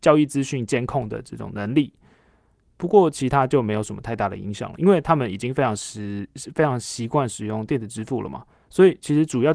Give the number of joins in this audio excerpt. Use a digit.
0